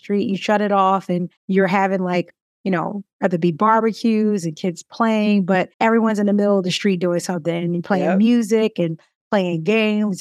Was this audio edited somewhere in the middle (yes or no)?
yes